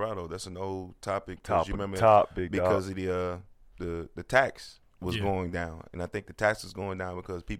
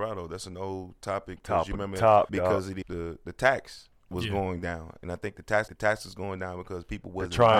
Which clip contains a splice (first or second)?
second